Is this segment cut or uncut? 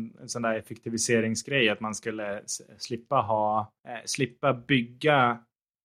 cut